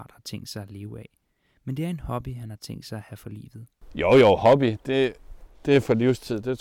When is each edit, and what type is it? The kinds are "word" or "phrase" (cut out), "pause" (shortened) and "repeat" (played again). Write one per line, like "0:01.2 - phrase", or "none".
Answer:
none